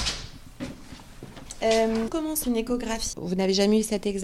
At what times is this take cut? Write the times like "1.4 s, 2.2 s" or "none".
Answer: 2.1 s, 2.4 s, 3.1 s